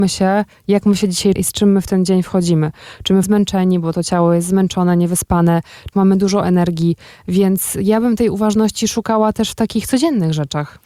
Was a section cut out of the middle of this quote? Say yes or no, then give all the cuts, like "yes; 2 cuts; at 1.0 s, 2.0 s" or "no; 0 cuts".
yes; 3 cuts; at 1.4 s, 3.2 s, 5.9 s